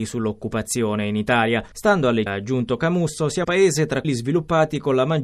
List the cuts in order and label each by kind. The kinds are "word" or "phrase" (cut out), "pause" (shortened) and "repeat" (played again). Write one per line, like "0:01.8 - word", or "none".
0:02.3 - word
0:03.4 - word
0:04.0 - word